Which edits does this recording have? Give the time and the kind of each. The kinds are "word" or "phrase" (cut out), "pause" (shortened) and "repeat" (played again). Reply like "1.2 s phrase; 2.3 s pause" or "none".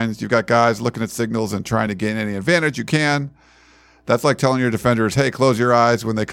none